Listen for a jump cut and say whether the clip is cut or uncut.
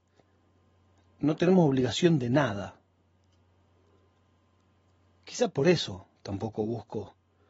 uncut